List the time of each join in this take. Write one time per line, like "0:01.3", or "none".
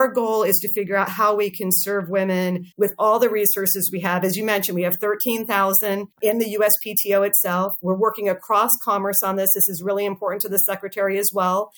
0:02.7
0:06.1